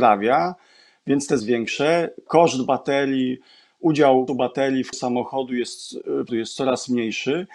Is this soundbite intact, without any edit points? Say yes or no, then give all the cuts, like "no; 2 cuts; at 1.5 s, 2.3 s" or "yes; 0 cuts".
no; 4 cuts; at 1.4 s, 4.3 s, 4.9 s, 6.3 s